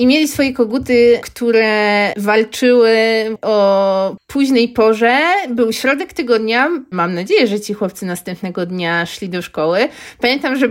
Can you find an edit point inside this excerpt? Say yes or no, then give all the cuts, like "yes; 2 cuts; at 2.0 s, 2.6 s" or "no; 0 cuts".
no; 0 cuts